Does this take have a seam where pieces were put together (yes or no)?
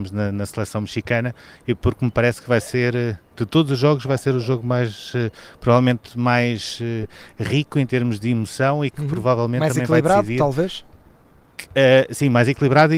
no